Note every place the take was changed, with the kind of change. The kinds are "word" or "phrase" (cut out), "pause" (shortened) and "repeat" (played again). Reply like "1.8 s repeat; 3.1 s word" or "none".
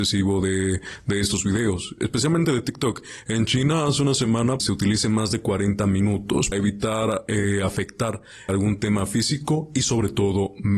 4.6 s phrase; 6.5 s word; 8.5 s word

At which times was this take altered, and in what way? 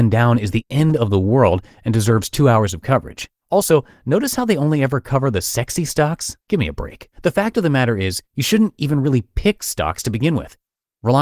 3.4 s pause; 6.4 s pause; 7.1 s pause; 8.3 s pause

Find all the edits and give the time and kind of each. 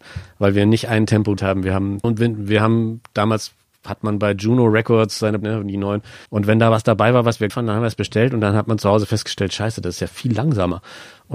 1.4 s word; 2.0 s word; 5.4 s phrase; 6.3 s pause; 7.5 s word

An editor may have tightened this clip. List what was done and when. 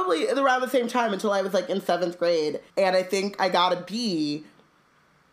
2.7 s pause

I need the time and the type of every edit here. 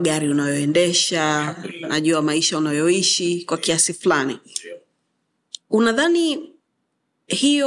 none

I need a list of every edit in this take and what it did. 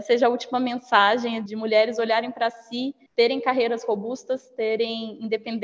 1.5 s word; 3.1 s pause

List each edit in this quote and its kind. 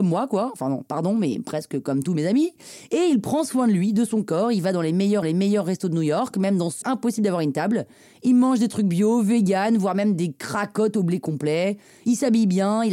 5.2 s repeat; 6.8 s phrase

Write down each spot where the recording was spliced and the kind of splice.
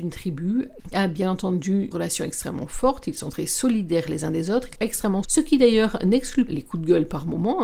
0.9 s word; 1.9 s word; 4.7 s word; 5.2 s word; 6.5 s word

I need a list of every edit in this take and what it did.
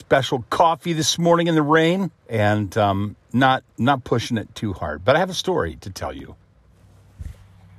2.2 s pause; 3.7 s pause

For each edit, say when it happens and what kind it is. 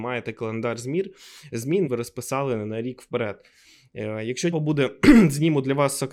1.9 s word; 4.5 s word

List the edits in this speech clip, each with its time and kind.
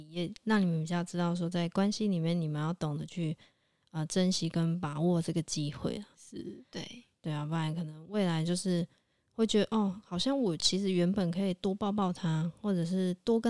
none

